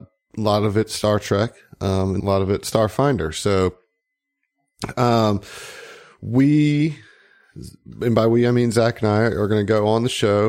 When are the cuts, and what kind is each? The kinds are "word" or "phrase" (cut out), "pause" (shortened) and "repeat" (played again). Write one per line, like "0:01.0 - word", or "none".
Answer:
0:02.2 - word